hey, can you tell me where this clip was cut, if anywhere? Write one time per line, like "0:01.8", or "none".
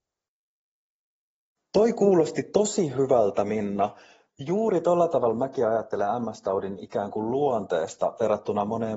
none